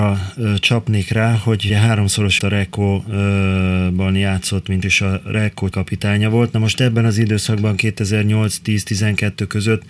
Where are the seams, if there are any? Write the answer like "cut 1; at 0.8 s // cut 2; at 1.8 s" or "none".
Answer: cut 1; at 1.7 s // cut 2; at 2.4 s // cut 3; at 4.8 s // cut 4; at 5.7 s